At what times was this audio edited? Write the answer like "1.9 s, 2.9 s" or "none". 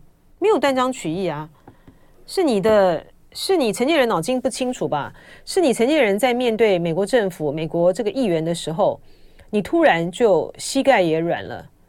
none